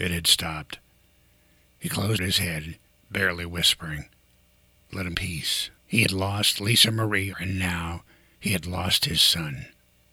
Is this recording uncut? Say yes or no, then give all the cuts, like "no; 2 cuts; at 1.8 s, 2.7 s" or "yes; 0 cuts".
no; 6 cuts; at 2.2 s, 2.9 s, 4.3 s, 5.1 s, 5.8 s, 7.3 s